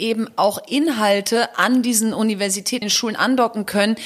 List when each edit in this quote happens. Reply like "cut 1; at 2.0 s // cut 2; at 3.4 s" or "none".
cut 1; at 2.8 s